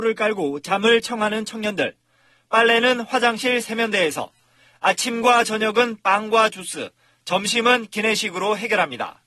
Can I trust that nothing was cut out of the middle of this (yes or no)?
yes